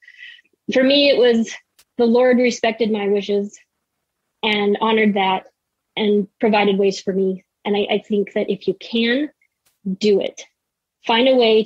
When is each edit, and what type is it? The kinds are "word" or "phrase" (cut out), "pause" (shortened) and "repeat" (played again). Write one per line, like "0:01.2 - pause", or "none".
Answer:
none